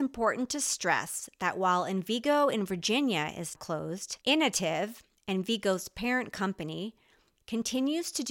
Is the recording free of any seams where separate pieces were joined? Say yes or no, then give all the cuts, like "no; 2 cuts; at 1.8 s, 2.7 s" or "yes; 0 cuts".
no; 2 cuts; at 3.6 s, 4.2 s